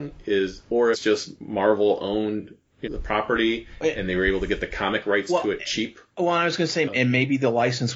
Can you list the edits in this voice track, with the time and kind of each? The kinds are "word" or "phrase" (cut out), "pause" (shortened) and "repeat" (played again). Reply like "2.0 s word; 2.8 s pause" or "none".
0.9 s phrase; 2.8 s phrase; 6.8 s word